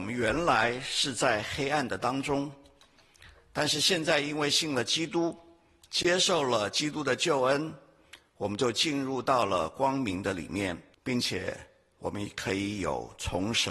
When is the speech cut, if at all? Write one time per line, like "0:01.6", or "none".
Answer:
0:10.9